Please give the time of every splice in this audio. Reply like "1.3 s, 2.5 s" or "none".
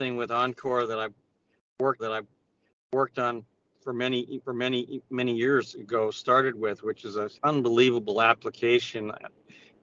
2.0 s, 4.4 s, 7.4 s